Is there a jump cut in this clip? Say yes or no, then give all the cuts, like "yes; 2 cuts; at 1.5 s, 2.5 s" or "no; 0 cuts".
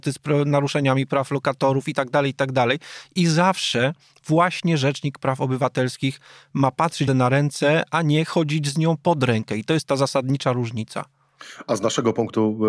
yes; 1 cut; at 7.1 s